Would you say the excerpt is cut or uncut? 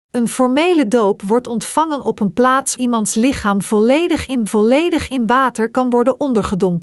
cut